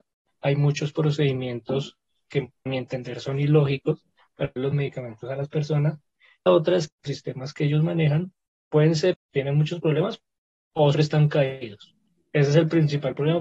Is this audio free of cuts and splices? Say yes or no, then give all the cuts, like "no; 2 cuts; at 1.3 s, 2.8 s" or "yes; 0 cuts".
no; 6 cuts; at 2.7 s, 4.6 s, 6.5 s, 7.1 s, 9.1 s, 10.9 s